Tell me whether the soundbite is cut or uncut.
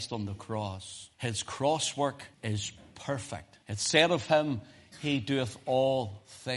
cut